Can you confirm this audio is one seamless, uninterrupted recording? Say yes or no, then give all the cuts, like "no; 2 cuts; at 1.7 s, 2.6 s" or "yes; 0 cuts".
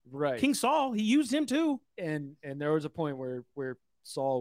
yes; 0 cuts